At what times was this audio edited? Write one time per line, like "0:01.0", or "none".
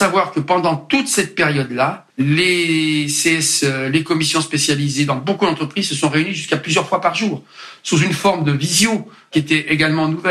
0:02.1